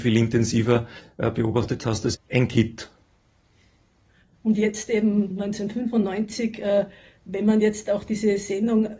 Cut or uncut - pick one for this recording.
cut